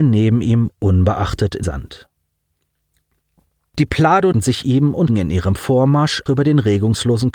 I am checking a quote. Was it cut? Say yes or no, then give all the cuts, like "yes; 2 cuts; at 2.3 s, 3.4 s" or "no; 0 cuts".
yes; 4 cuts; at 1.6 s, 4.3 s, 5.1 s, 6.3 s